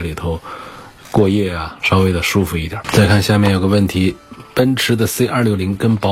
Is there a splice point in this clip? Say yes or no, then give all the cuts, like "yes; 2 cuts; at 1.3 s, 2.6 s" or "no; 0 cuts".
yes; 1 cut; at 1.8 s